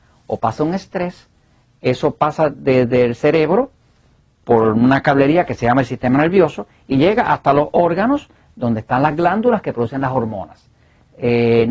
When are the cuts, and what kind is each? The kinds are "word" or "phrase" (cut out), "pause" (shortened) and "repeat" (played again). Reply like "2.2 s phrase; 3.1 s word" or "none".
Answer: none